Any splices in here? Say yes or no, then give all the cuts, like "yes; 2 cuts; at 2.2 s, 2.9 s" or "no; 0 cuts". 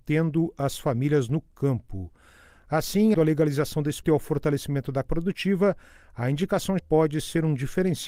yes; 4 cuts; at 3.1 s, 4.0 s, 5.0 s, 6.8 s